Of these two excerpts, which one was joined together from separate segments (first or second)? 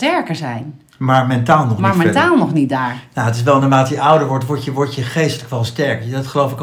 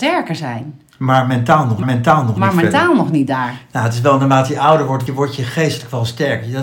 second